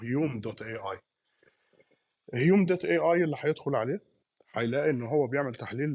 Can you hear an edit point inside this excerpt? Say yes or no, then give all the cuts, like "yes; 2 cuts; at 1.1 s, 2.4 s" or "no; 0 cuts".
no; 0 cuts